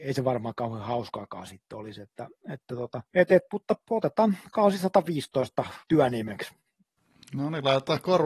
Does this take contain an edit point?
yes; 2 cuts; at 3.1 s, 5.8 s

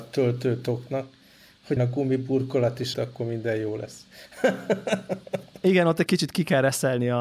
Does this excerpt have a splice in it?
yes; 3 cuts; at 1.8 s, 2.9 s, 6.1 s

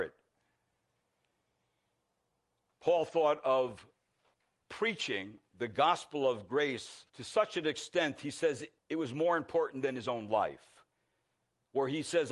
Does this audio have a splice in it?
yes; 3 cuts; at 4.3 s, 7.1 s, 8.8 s

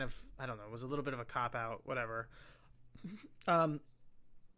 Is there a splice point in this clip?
no; 0 cuts

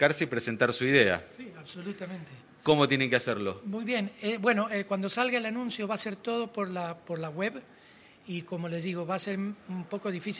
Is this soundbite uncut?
yes; 0 cuts

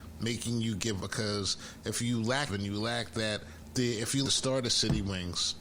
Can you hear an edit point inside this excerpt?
yes; 3 cuts; at 1.0 s, 2.5 s, 4.2 s

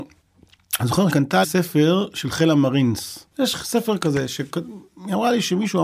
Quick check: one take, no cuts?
no; 3 cuts; at 1.1 s, 1.4 s, 3.3 s

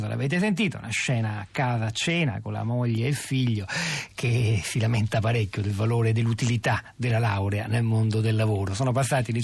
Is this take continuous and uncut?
yes; 0 cuts

